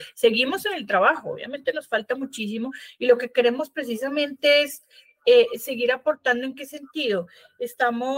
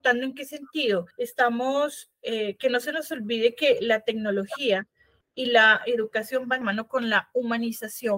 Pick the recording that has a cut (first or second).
second